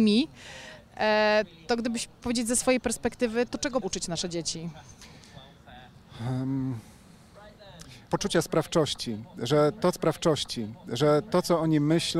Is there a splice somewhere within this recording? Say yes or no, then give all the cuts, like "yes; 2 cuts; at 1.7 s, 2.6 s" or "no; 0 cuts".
yes; 5 cuts; at 2.2 s, 3.5 s, 3.8 s, 8.1 s, 9.9 s